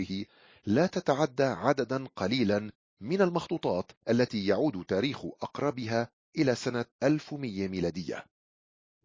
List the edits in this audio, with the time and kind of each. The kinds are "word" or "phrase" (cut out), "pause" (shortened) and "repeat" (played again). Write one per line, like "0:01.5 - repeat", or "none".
0:04.0 - pause
0:06.9 - pause